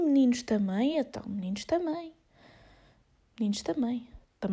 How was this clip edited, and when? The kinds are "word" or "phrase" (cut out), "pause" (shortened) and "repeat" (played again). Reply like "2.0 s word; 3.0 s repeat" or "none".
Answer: none